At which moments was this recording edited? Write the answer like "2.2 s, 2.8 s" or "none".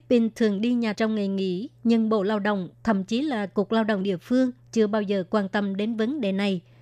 0.9 s